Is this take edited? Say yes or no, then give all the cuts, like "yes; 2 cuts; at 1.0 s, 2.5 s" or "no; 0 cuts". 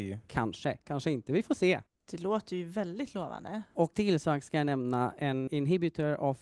yes; 2 cuts; at 3.9 s, 5.5 s